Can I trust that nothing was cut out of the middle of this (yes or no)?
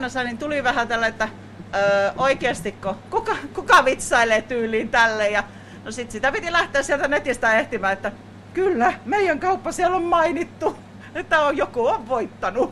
yes